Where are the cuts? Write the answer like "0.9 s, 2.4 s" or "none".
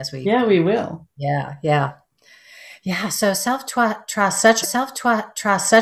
4.6 s